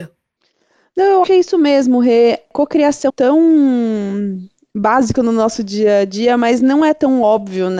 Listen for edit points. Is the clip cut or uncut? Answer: cut